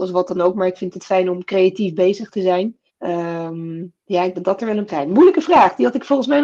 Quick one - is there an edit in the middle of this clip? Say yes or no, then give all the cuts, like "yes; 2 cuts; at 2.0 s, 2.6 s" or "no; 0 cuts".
yes; 4 cuts; at 2.9 s, 4.0 s, 4.3 s, 4.9 s